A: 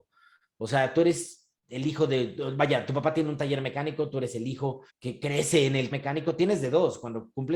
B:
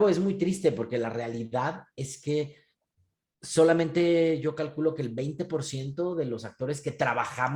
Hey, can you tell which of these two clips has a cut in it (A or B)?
A